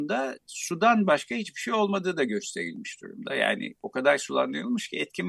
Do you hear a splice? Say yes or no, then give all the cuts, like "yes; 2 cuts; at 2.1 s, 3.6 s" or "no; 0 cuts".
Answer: no; 0 cuts